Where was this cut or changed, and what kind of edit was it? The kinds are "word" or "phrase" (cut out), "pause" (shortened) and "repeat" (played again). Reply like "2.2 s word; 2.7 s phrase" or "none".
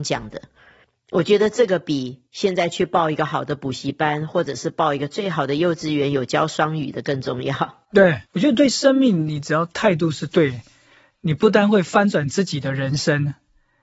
2.3 s pause; 8.3 s pause